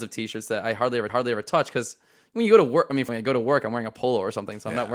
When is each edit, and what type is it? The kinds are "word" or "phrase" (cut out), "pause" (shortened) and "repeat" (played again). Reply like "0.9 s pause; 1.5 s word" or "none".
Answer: 1.1 s repeat; 3.1 s phrase